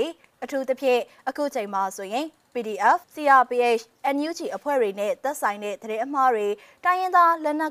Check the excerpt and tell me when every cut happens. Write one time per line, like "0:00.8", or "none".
0:03.0